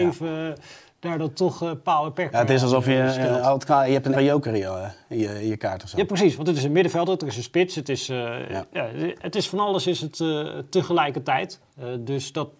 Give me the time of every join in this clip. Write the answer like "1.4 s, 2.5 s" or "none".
4.1 s